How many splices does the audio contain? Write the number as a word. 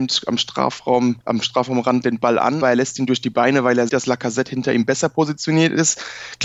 three